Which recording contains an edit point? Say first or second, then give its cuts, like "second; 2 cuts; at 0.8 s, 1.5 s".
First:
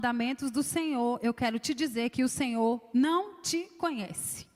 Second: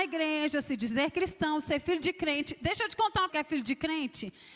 second; 1 cut; at 3.3 s